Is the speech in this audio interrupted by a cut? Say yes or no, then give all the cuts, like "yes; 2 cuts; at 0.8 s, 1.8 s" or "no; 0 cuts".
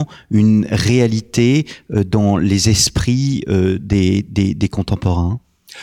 no; 0 cuts